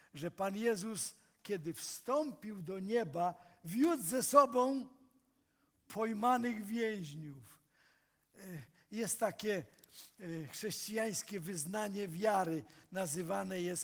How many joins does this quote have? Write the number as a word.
zero